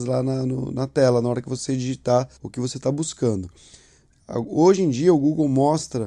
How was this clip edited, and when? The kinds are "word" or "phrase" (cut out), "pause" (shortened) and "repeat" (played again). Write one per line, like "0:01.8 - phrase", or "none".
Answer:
0:02.4 - pause